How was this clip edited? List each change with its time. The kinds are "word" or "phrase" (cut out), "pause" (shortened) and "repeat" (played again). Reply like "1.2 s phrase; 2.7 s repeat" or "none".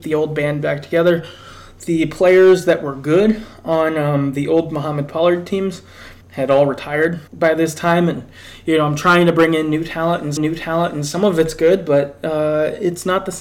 6.2 s pause; 7.3 s pause; 10.4 s repeat